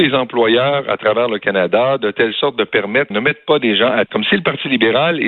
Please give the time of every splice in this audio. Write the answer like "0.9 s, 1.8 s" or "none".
3.1 s, 4.1 s